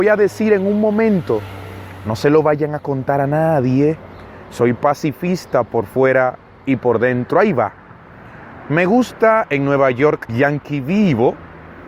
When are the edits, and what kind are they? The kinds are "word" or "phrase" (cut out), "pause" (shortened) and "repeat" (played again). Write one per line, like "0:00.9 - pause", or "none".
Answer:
0:10.3 - word